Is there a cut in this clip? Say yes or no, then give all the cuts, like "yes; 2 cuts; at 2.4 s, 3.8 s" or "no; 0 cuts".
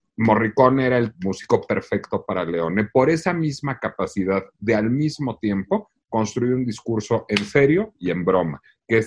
yes; 1 cut; at 1.1 s